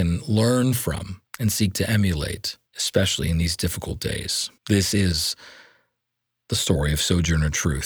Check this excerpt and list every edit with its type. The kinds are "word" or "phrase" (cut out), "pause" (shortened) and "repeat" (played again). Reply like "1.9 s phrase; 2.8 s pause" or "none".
1.3 s pause; 2.7 s pause; 4.6 s pause